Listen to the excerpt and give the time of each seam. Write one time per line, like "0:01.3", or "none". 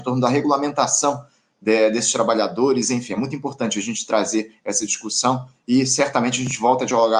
none